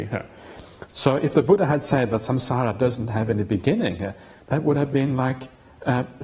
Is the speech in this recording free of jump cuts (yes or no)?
yes